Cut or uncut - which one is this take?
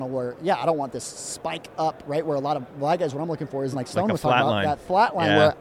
cut